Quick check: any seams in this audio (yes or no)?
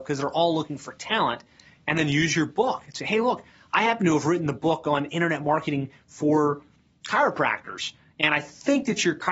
no